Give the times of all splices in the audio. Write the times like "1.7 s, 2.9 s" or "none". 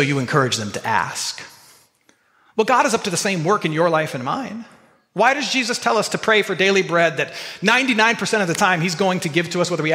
none